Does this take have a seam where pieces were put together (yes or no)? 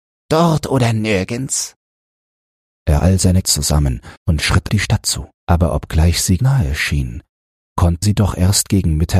yes